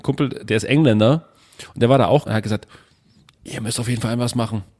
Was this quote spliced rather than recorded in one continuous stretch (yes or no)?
yes